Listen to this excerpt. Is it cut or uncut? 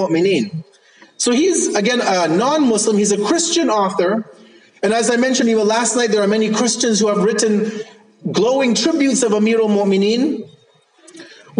uncut